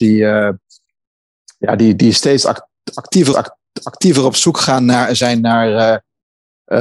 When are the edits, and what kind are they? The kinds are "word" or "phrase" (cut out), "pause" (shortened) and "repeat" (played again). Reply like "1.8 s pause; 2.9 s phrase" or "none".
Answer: 3.3 s repeat